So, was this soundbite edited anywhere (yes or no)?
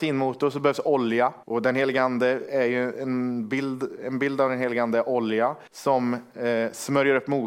yes